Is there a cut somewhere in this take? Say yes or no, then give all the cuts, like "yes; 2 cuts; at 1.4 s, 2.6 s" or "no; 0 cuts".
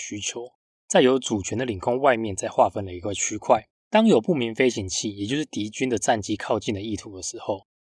yes; 1 cut; at 3.8 s